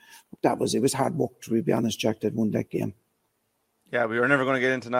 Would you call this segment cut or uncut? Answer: uncut